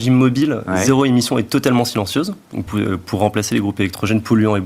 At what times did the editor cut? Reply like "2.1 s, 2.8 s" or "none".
2.7 s

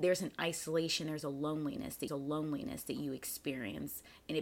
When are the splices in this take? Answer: 2.1 s

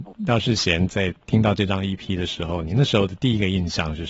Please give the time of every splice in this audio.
none

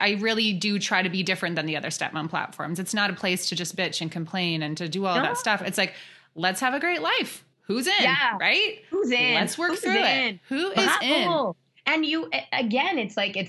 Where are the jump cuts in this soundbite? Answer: 7.5 s

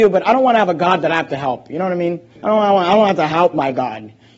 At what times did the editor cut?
2.4 s

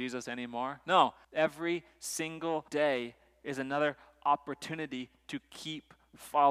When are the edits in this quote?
1.2 s, 2.7 s

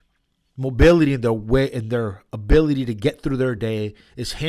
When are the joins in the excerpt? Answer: none

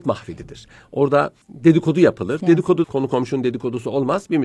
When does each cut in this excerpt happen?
1.4 s, 2.8 s

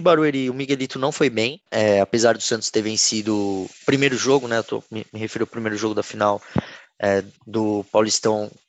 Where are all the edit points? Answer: 1.7 s, 7.4 s

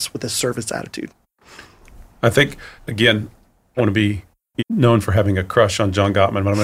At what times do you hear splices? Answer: 2.8 s, 3.8 s, 4.6 s

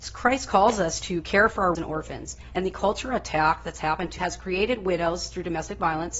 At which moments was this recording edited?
1.7 s, 4.2 s

